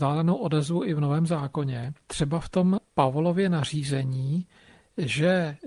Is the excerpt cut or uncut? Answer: cut